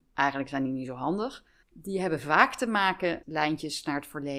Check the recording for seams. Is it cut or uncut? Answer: cut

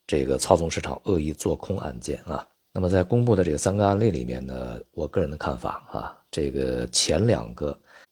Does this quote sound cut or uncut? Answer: cut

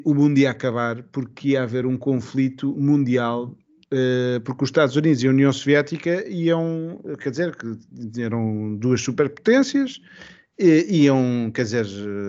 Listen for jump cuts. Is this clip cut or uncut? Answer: uncut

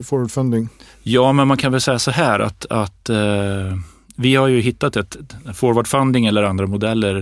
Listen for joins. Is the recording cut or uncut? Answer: uncut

